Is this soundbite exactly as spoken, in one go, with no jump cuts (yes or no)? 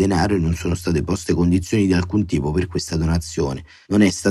yes